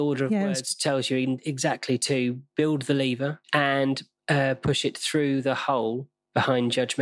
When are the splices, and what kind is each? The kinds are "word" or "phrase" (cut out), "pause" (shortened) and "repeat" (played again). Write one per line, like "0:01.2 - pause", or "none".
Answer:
0:03.4 - pause